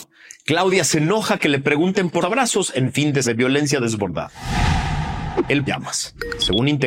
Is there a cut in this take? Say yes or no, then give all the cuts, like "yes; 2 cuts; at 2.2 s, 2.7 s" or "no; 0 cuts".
yes; 3 cuts; at 2.2 s, 3.2 s, 5.7 s